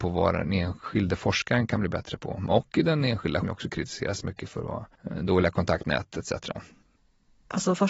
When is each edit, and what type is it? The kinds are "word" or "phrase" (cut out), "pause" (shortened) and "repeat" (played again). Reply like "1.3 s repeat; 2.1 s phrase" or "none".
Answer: 3.4 s phrase